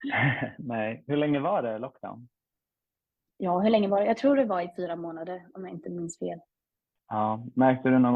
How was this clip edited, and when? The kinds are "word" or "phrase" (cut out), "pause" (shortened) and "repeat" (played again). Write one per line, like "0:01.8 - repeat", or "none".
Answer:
none